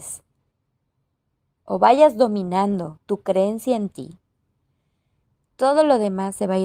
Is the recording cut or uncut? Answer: cut